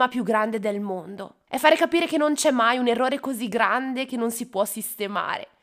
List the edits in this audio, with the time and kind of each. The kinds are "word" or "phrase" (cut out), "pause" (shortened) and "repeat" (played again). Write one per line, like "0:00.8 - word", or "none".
0:01.5 - pause